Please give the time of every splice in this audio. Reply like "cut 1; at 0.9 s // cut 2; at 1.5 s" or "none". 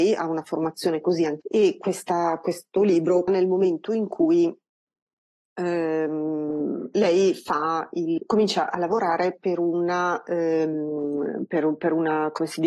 cut 1; at 1.4 s // cut 2; at 3.3 s // cut 3; at 8.2 s